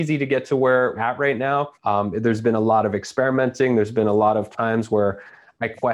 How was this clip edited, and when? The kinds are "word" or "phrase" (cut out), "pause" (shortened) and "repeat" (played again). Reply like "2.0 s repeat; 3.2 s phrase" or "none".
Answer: 0.9 s word; 1.7 s pause